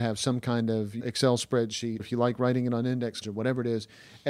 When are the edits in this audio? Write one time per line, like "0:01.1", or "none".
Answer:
0:01.0
0:02.0
0:03.2